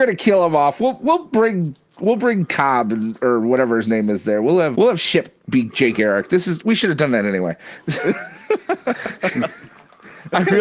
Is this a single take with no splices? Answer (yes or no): no